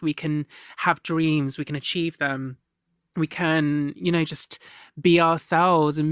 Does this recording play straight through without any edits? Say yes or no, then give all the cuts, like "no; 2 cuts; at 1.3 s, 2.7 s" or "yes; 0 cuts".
yes; 0 cuts